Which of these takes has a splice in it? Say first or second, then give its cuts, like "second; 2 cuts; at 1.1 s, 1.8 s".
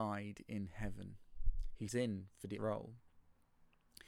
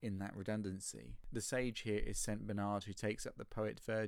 first; 2 cuts; at 1.9 s, 2.6 s